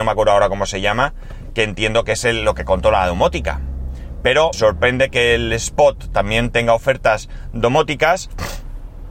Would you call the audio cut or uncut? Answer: cut